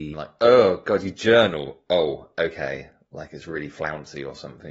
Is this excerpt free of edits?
yes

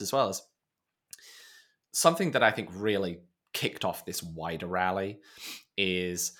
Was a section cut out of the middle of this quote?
no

